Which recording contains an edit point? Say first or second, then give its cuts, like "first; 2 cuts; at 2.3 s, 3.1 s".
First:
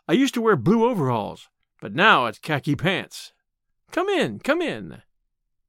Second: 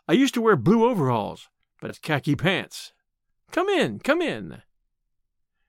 second; 1 cut; at 1.9 s